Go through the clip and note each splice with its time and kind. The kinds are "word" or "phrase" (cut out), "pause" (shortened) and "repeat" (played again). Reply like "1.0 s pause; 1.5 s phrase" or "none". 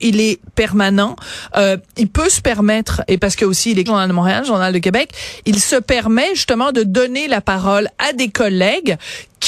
3.9 s phrase